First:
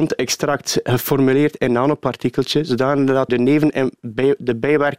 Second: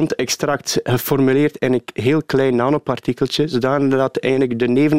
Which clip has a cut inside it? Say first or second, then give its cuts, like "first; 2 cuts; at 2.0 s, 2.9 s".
first; 2 cuts; at 1.7 s, 3.3 s